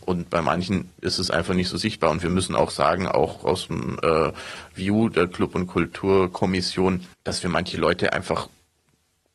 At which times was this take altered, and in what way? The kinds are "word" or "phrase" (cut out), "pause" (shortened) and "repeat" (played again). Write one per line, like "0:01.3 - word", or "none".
0:07.1 - pause